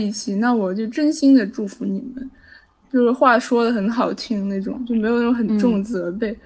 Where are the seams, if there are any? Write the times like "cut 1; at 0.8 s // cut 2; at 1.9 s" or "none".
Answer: none